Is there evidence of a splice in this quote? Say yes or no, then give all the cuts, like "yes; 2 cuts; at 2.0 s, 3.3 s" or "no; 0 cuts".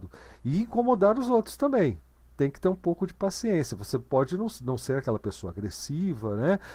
no; 0 cuts